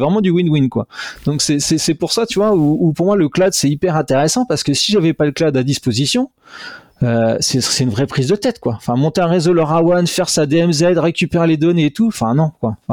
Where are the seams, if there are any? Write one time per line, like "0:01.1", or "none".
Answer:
none